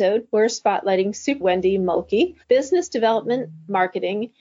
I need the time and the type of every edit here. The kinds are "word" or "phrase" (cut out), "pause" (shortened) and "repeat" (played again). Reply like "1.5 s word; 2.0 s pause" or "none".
1.4 s word; 2.4 s pause